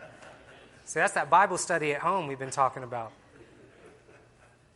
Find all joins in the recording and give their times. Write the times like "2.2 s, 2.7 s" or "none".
none